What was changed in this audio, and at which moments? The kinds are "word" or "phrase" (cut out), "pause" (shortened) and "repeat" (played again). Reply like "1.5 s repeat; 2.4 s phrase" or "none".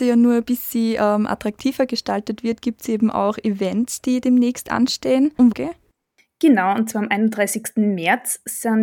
5.5 s phrase